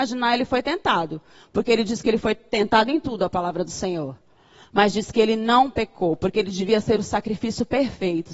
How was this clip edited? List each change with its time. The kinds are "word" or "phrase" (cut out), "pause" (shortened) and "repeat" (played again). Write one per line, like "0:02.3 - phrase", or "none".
none